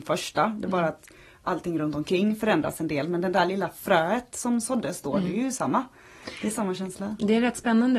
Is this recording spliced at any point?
no; 0 cuts

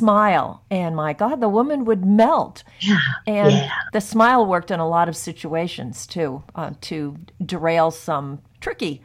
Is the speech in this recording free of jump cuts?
no; 1 cut; at 2.7 s

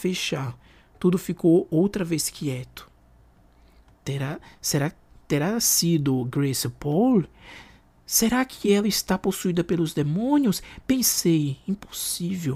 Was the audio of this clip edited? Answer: no; 0 cuts

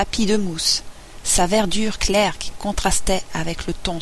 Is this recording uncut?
yes; 0 cuts

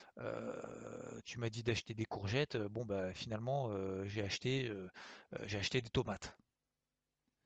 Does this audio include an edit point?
no; 0 cuts

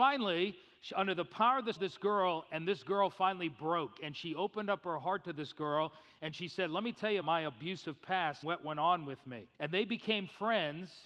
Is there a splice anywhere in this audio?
yes; 4 cuts; at 1.8 s, 7.2 s, 8.4 s, 9.5 s

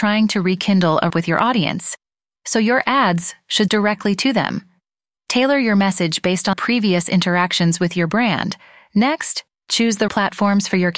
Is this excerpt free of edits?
no; 4 cuts; at 1.1 s, 3.7 s, 6.5 s, 10.1 s

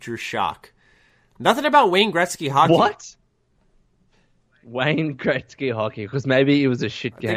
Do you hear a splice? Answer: no; 0 cuts

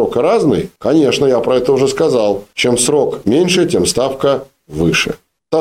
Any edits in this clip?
no; 0 cuts

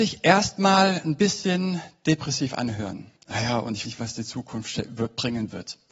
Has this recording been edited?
yes; 2 cuts; at 3.2 s, 3.8 s

